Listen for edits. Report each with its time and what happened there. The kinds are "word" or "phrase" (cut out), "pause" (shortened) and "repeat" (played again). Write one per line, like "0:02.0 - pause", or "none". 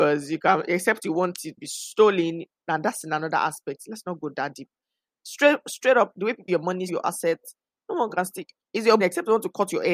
0:01.6 - word
0:06.1 - word
0:06.5 - word
0:06.9 - word
0:09.0 - word